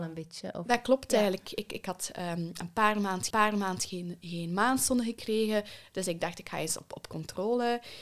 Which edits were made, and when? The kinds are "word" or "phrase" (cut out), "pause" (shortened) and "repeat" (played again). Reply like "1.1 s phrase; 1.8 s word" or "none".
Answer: 3.3 s repeat